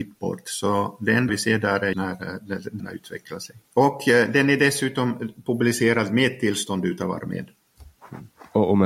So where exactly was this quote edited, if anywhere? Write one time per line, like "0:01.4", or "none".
0:01.3
0:01.9
0:02.8
0:03.6